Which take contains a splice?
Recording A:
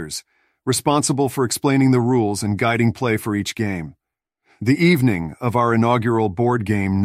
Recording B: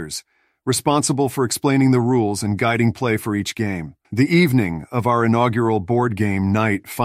B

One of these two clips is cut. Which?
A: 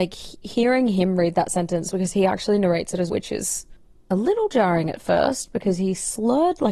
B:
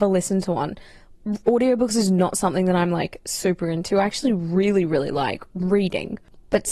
A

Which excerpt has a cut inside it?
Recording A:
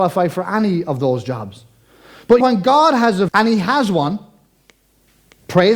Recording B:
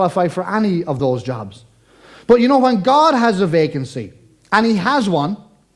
A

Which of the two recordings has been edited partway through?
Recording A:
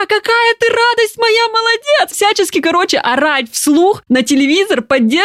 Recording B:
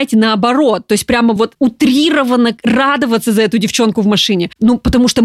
A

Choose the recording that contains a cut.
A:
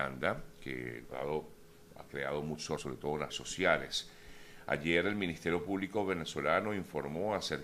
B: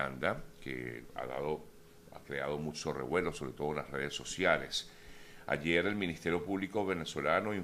A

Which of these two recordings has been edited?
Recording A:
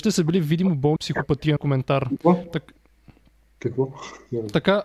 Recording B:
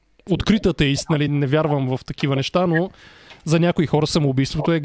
A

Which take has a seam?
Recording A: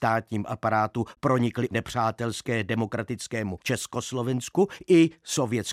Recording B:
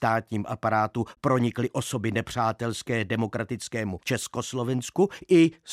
A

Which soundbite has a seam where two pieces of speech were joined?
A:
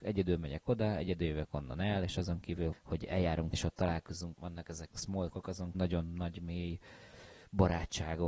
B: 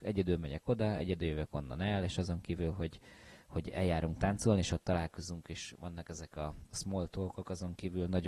A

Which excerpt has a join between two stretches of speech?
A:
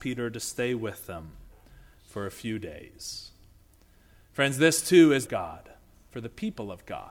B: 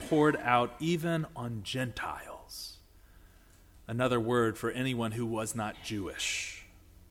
A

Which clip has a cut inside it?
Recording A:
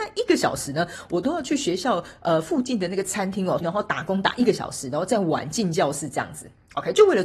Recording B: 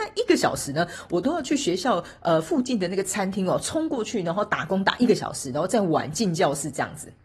A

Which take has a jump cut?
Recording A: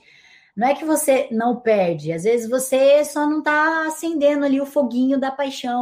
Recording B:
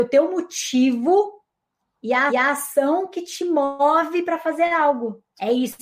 B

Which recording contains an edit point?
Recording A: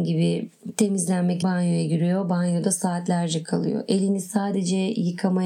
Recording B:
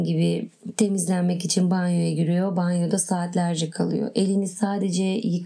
A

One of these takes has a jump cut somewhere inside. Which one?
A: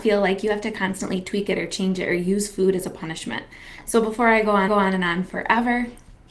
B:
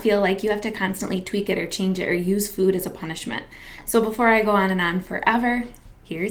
A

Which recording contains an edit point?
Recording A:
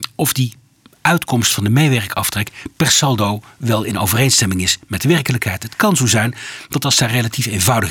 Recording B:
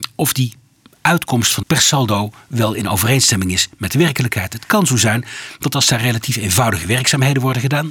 B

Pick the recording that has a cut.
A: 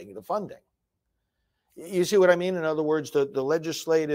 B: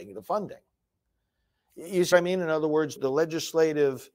B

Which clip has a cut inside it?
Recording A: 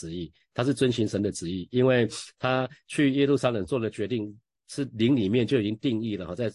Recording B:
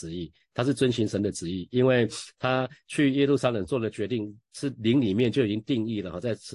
B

